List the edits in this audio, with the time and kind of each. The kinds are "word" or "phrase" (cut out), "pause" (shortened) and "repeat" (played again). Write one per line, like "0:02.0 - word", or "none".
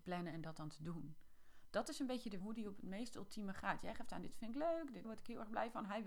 0:02.4 - word
0:05.0 - word